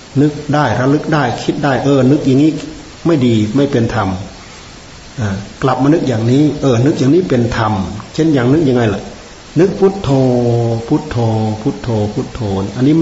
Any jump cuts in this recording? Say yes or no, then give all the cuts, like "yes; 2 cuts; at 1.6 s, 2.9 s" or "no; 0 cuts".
no; 0 cuts